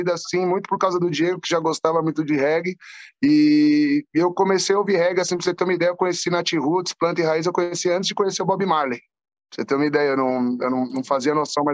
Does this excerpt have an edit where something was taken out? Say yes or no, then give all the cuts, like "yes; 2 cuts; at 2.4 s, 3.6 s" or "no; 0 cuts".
no; 0 cuts